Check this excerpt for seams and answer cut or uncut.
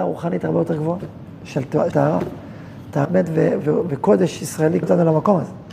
cut